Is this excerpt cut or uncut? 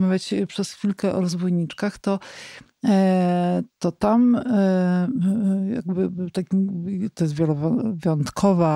uncut